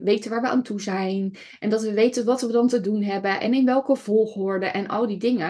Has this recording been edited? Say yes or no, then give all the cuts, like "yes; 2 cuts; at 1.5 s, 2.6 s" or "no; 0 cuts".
no; 0 cuts